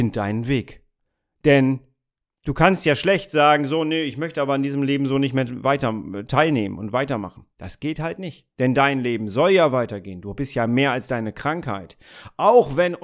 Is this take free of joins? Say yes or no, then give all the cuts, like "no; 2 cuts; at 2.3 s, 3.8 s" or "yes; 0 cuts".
no; 3 cuts; at 1.0 s, 7.5 s, 8.5 s